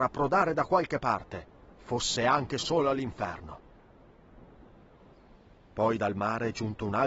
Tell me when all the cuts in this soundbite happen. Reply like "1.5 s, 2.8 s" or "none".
none